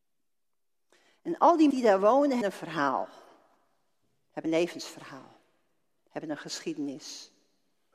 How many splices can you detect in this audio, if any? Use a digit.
3